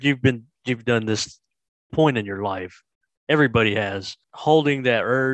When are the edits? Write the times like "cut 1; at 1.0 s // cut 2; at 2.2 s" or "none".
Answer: cut 1; at 1.9 s // cut 2; at 4.2 s

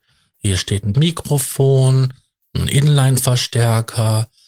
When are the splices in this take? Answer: cut 1; at 0.9 s

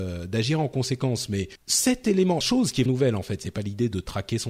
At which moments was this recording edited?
cut 1; at 1.6 s // cut 2; at 2.4 s // cut 3; at 2.9 s

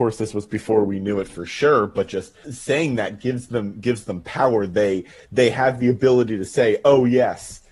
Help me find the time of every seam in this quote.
cut 1; at 2.4 s

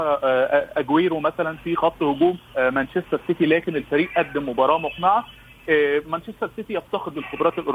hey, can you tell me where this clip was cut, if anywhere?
cut 1; at 2.5 s

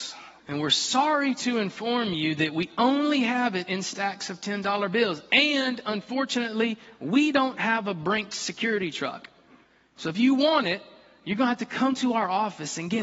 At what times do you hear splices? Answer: none

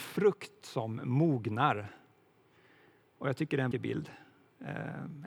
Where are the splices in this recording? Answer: cut 1; at 3.7 s

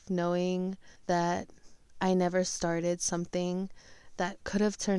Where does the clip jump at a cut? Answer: cut 1; at 0.9 s

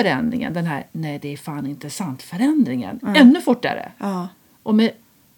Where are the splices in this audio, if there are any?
none

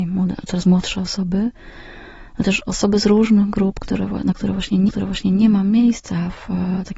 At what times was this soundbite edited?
cut 1; at 4.9 s

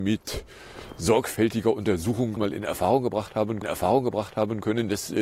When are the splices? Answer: cut 1; at 2.4 s // cut 2; at 3.6 s

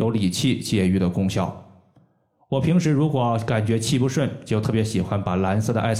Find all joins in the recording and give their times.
none

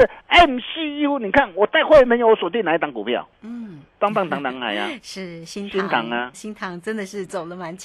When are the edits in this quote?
cut 1; at 3.9 s // cut 2; at 6.3 s

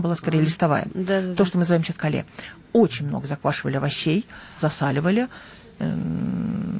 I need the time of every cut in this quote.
cut 1; at 2.0 s // cut 2; at 4.6 s

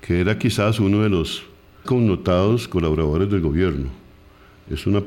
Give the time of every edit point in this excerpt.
cut 1; at 1.9 s

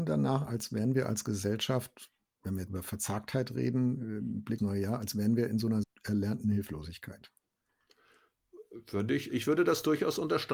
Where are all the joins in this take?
cut 1; at 2.7 s // cut 2; at 4.6 s // cut 3; at 5.8 s // cut 4; at 9.3 s

